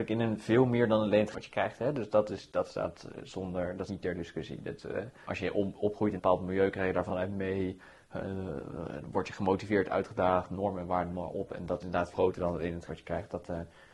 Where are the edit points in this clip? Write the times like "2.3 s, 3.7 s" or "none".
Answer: 1.3 s, 3.9 s, 5.2 s, 6.2 s, 7.1 s, 11.1 s, 11.8 s, 12.1 s, 12.9 s